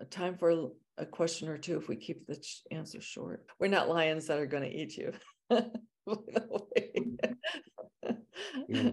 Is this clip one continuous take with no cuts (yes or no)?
yes